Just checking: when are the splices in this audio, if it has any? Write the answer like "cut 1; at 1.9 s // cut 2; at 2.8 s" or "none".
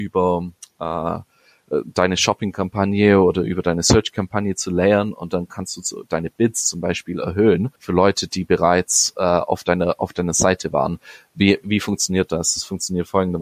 cut 1; at 7.8 s // cut 2; at 11.6 s